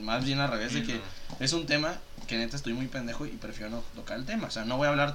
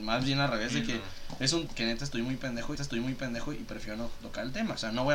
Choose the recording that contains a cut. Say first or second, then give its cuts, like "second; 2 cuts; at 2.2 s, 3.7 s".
second; 2 cuts; at 1.7 s, 2.8 s